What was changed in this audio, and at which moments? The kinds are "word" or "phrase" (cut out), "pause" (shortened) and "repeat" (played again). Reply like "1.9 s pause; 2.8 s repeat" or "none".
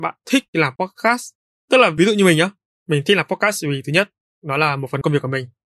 none